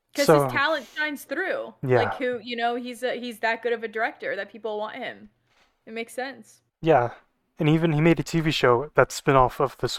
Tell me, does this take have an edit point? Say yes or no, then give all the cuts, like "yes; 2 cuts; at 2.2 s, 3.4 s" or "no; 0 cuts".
no; 0 cuts